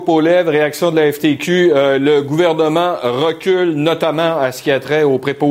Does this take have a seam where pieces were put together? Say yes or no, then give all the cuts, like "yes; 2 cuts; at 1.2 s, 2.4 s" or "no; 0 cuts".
no; 0 cuts